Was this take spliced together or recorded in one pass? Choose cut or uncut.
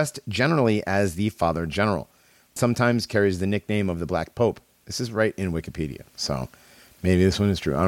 cut